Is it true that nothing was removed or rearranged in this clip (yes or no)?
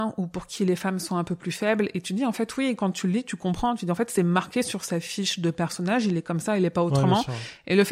yes